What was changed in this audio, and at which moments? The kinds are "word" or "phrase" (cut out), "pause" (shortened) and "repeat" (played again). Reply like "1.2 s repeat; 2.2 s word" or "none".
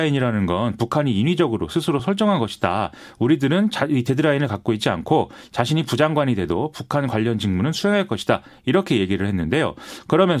none